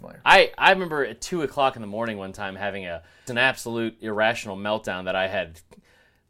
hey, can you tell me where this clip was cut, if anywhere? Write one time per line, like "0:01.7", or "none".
0:03.3